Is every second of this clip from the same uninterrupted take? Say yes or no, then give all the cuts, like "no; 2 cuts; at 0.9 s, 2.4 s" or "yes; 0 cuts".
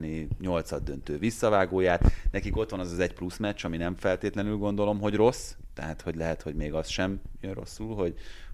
yes; 0 cuts